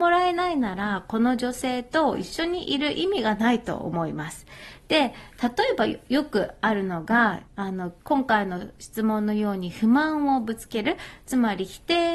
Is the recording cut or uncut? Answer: cut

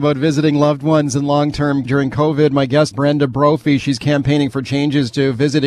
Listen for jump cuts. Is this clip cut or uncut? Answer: cut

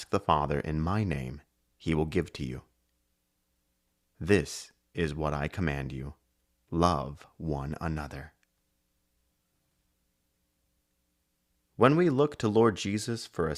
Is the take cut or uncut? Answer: uncut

